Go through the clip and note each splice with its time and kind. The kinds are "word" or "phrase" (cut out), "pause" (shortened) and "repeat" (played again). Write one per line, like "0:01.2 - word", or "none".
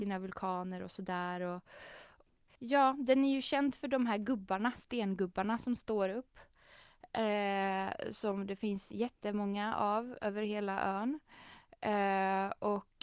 none